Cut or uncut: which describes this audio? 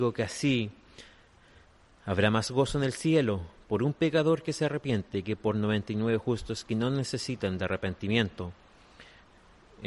uncut